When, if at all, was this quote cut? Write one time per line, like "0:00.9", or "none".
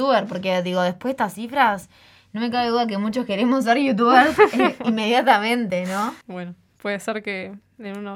0:06.2